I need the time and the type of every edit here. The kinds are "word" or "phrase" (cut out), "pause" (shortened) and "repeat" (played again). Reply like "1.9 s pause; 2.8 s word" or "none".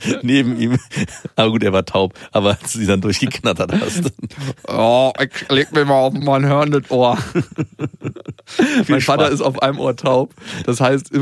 none